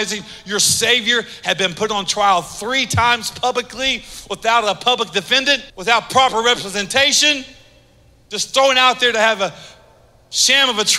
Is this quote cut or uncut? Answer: cut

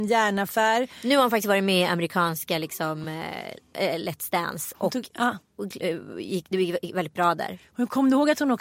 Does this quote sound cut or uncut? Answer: uncut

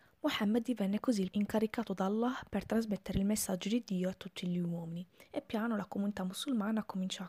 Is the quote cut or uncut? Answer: cut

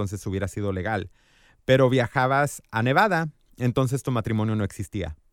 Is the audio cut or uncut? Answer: uncut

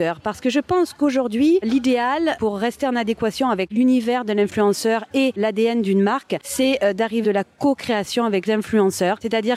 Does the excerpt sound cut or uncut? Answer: cut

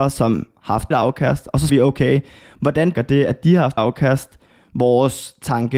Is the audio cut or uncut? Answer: cut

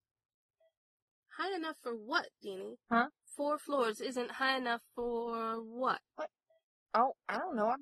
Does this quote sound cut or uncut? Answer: uncut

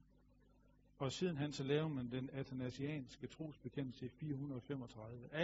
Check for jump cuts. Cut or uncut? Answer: uncut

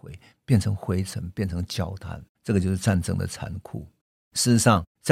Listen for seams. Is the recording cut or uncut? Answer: cut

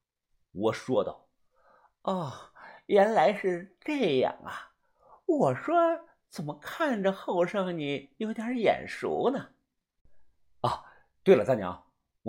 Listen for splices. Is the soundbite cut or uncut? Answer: uncut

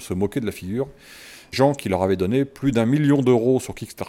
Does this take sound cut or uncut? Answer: cut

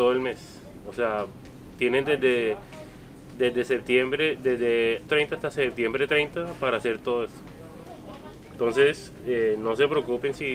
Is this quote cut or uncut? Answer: cut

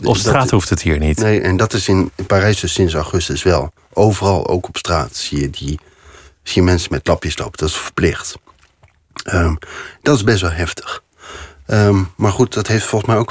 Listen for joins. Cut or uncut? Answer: uncut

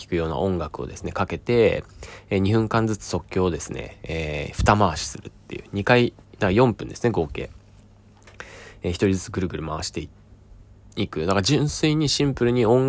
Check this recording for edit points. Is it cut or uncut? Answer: uncut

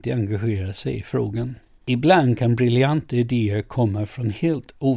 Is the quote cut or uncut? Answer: uncut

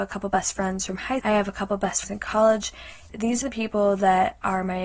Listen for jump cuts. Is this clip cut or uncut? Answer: cut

